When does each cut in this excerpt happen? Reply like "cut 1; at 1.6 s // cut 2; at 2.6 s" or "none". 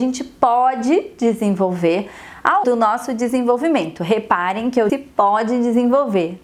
cut 1; at 2.6 s // cut 2; at 4.9 s